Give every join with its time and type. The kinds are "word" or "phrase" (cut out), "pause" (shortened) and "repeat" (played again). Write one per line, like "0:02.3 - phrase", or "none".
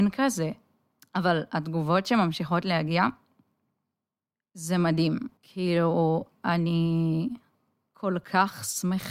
0:05.4 - pause